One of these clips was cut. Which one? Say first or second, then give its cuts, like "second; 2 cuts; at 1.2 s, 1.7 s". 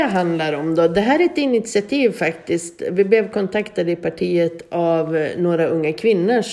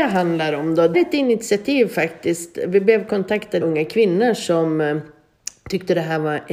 second; 2 cuts; at 0.9 s, 3.6 s